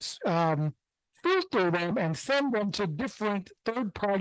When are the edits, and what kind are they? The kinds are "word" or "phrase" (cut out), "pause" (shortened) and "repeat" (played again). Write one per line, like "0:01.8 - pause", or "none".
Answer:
none